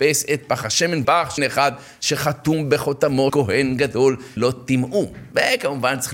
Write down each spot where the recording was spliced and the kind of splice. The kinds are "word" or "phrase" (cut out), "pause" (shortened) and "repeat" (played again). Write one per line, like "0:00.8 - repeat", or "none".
0:01.0 - word
0:01.4 - word
0:03.3 - word
0:04.4 - word